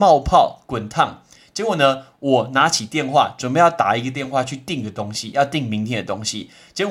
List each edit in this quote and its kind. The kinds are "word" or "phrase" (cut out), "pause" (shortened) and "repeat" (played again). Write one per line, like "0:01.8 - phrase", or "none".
none